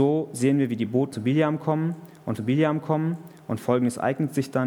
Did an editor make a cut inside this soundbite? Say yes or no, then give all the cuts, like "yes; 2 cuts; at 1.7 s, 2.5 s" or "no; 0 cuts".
yes; 2 cuts; at 1.1 s, 2.4 s